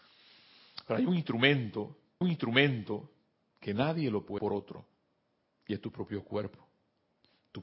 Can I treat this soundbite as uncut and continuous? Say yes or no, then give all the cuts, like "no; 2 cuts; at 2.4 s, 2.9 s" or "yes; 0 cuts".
no; 3 cuts; at 2.2 s, 4.4 s, 5.4 s